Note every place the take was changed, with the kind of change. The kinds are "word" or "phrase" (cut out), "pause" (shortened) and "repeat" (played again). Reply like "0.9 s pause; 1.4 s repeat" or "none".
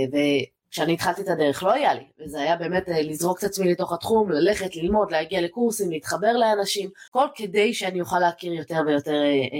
7.1 s pause